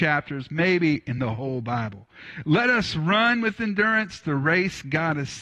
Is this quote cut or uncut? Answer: uncut